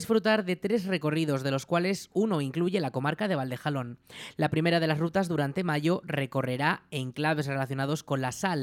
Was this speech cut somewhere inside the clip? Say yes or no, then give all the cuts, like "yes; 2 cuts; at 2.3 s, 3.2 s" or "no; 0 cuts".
no; 0 cuts